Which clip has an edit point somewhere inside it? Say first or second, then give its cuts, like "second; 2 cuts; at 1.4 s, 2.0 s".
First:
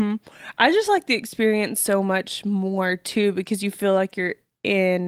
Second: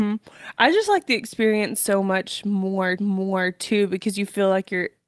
second; 1 cut; at 3.0 s